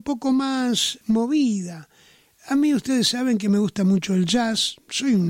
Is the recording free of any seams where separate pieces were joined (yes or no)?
no